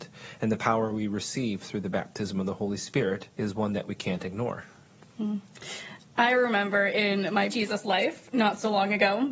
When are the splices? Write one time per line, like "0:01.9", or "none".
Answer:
0:03.3
0:07.5